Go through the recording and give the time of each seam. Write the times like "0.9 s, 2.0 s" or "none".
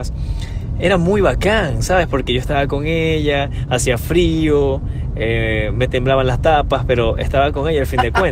none